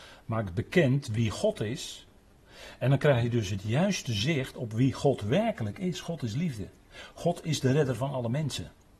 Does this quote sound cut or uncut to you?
uncut